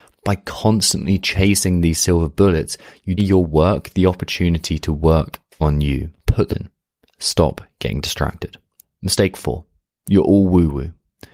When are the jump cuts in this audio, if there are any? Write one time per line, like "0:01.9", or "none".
0:03.2
0:06.2
0:06.5
0:08.8